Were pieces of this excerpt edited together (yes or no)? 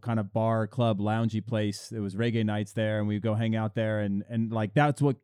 no